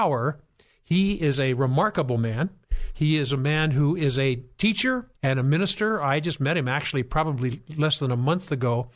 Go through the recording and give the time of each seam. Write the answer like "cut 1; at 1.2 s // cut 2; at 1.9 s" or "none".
cut 1; at 5.2 s